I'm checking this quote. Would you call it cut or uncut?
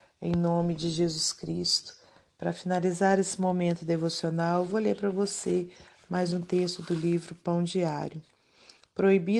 uncut